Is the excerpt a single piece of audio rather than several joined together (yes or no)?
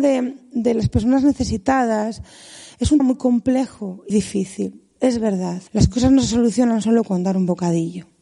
no